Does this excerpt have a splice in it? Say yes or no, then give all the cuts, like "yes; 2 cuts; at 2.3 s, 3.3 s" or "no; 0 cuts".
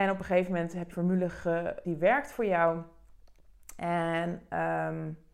yes; 2 cuts; at 0.9 s, 1.8 s